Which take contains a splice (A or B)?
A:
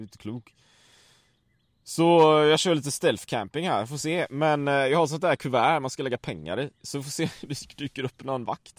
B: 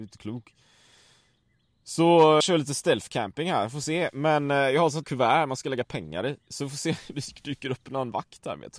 B